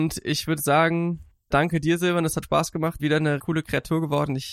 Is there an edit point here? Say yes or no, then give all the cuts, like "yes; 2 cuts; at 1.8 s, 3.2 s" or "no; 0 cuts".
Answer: yes; 4 cuts; at 1.5 s, 2.4 s, 3.0 s, 3.4 s